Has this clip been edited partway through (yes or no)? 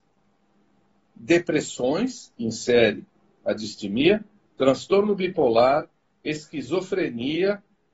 yes